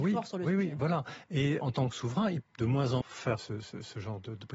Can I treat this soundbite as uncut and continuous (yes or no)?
no